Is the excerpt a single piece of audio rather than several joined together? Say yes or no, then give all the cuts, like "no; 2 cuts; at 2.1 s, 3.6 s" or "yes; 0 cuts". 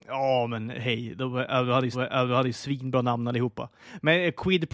no; 1 cut; at 1.9 s